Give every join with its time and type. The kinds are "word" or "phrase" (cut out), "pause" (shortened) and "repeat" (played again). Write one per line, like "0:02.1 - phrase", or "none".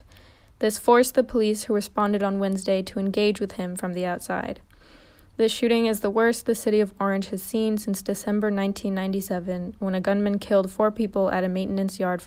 none